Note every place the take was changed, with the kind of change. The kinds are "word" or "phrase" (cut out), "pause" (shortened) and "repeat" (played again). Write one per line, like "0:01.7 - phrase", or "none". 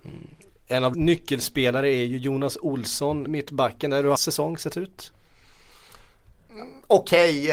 0:00.9 - word
0:03.3 - word
0:04.2 - word